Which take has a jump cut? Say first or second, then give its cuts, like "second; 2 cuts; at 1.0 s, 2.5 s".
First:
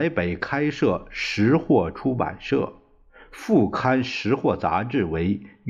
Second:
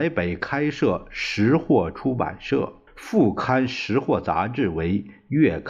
second; 1 cut; at 2.9 s